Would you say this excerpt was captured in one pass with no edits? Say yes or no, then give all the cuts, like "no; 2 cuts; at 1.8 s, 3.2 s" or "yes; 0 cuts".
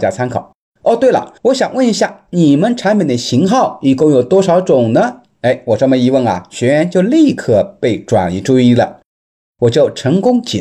no; 1 cut; at 1.4 s